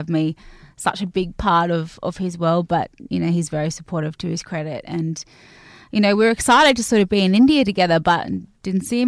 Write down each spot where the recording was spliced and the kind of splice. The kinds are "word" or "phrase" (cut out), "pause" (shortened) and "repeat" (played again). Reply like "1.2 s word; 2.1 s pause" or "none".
none

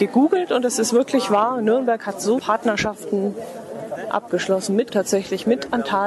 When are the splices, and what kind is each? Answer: 2.4 s phrase; 4.9 s word

